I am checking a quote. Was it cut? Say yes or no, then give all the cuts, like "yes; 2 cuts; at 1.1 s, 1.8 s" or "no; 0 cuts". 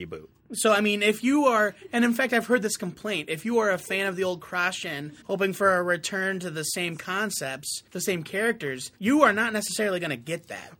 yes; 3 cuts; at 5.2 s, 7.9 s, 9.0 s